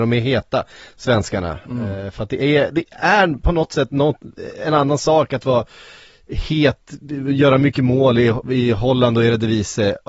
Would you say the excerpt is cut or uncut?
uncut